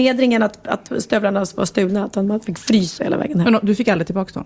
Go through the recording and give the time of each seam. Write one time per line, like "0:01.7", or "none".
0:03.0